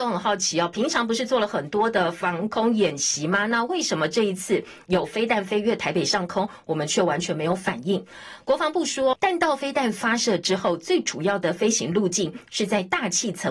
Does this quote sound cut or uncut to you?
cut